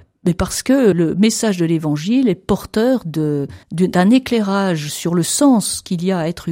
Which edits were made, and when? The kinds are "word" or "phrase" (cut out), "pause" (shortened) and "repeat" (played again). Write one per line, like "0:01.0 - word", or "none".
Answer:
0:00.9 - word
0:03.6 - pause